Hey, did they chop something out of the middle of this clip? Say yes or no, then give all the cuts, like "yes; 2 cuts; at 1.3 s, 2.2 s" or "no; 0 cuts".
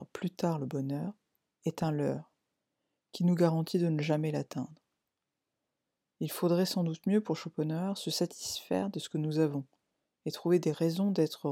no; 0 cuts